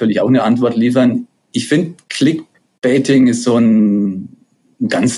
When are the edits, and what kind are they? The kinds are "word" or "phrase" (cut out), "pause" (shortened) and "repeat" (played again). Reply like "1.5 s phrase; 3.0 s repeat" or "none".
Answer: 2.0 s pause